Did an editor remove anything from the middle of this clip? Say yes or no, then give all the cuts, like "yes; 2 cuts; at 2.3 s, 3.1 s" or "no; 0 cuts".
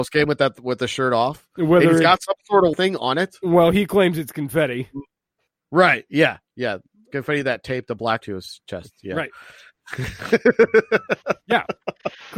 yes; 2 cuts; at 2.7 s, 8.2 s